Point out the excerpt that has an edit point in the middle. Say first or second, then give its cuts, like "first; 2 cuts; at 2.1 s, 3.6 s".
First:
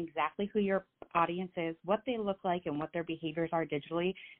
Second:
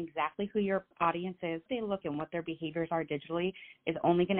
second; 3 cuts; at 0.9 s, 1.7 s, 2.0 s